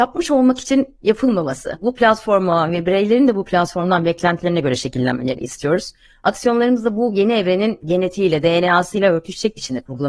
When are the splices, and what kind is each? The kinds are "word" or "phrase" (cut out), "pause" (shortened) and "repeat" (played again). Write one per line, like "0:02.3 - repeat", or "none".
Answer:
none